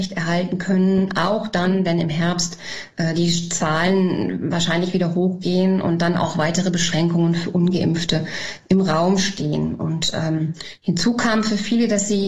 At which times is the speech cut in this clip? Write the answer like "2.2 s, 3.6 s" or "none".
none